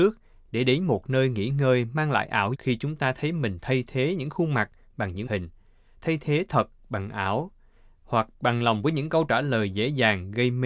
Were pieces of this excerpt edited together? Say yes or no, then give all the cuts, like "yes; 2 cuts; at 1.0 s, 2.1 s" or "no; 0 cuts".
yes; 2 cuts; at 2.5 s, 5.3 s